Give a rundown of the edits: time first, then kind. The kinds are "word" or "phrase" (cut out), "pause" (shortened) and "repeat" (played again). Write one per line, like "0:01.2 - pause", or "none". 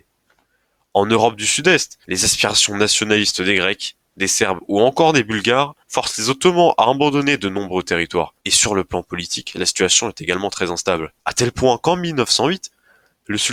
0:02.0 - pause
0:05.8 - pause
0:08.4 - pause
0:11.2 - pause